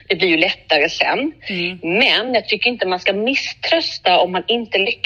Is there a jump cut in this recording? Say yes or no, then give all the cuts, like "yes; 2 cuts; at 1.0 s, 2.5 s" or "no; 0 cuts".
no; 0 cuts